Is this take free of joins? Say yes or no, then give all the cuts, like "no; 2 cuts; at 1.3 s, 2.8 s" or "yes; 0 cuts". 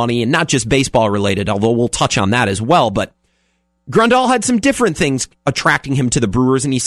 yes; 0 cuts